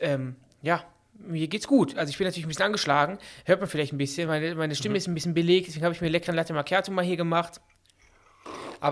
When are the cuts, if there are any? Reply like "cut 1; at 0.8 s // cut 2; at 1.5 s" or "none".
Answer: none